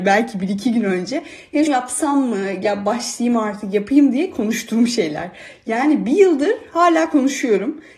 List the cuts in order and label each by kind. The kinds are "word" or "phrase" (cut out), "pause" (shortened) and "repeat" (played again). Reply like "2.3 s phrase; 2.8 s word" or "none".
1.7 s word